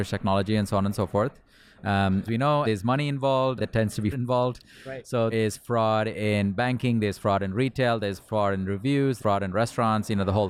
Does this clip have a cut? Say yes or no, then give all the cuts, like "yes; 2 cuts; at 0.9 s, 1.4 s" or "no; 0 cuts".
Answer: yes; 6 cuts; at 2.3 s, 2.6 s, 3.6 s, 4.1 s, 5.3 s, 9.2 s